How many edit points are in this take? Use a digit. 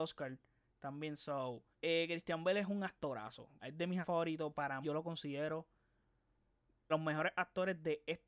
5